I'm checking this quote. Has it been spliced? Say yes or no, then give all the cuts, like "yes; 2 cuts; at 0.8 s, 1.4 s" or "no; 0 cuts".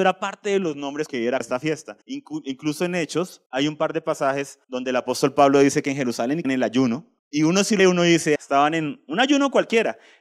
yes; 9 cuts; at 1.1 s, 1.4 s, 2.0 s, 3.5 s, 4.6 s, 6.4 s, 7.2 s, 7.8 s, 8.4 s